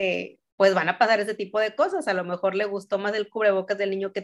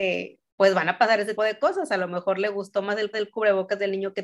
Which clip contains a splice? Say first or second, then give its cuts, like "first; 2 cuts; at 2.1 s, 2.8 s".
second; 2 cuts; at 1.4 s, 3.1 s